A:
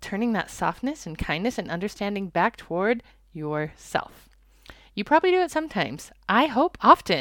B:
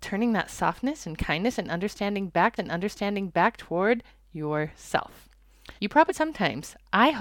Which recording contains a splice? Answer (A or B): B